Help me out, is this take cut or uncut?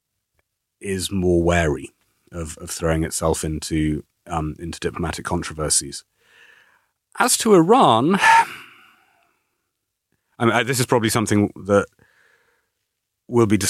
uncut